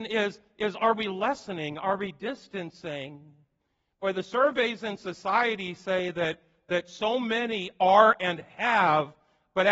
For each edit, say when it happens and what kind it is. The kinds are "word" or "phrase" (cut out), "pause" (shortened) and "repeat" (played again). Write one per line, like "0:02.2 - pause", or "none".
none